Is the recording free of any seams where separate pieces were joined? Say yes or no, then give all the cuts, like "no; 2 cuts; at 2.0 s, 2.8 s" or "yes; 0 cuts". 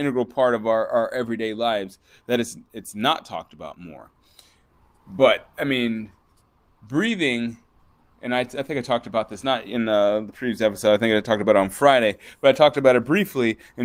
yes; 0 cuts